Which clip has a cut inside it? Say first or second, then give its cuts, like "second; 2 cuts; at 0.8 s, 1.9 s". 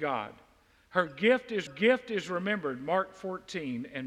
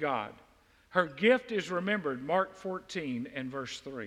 first; 1 cut; at 1.7 s